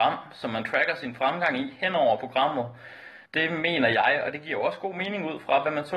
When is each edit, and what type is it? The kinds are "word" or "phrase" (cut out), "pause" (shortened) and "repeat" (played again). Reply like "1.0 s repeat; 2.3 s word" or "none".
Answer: 3.3 s pause